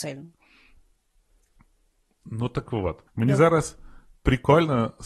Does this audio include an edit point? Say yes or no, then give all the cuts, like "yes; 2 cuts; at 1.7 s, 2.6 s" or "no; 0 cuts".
yes; 1 cut; at 3.1 s